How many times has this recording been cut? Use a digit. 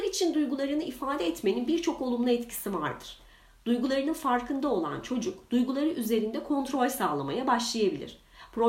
0